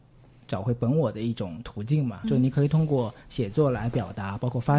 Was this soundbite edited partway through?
yes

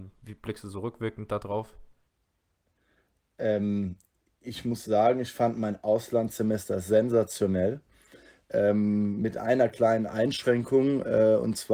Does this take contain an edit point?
no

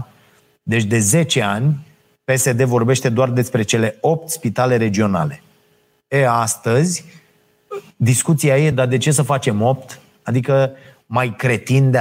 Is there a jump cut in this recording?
no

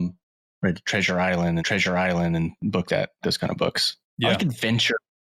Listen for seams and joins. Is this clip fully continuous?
no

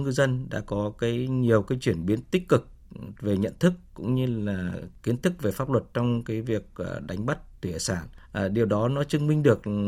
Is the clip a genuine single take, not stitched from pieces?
yes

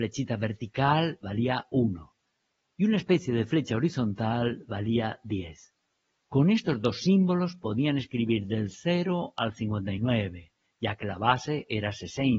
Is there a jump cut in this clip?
no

